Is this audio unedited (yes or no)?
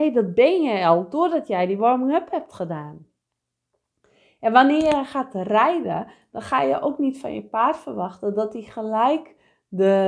yes